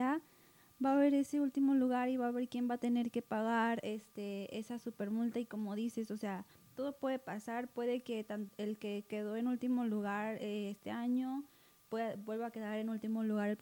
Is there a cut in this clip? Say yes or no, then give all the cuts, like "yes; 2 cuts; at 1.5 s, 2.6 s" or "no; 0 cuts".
no; 0 cuts